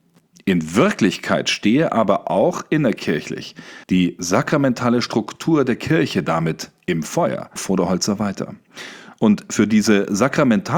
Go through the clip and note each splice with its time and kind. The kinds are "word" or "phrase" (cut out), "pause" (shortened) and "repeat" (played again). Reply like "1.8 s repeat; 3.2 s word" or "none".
3.8 s pause; 7.6 s word